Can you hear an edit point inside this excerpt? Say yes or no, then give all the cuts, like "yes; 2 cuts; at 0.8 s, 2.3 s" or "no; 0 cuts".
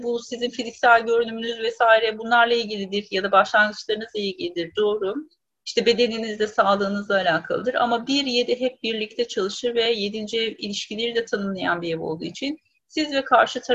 no; 0 cuts